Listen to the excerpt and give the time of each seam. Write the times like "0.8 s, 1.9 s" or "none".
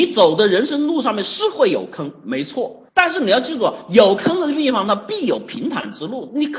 2.9 s

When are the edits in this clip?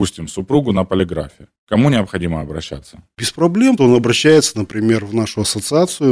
3.8 s

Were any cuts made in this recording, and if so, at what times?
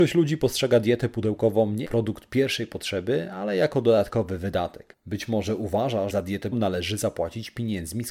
1.8 s, 6.1 s, 6.5 s

